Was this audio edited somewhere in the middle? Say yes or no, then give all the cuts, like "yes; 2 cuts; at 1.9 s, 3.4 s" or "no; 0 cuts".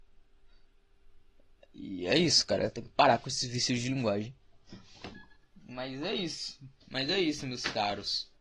no; 0 cuts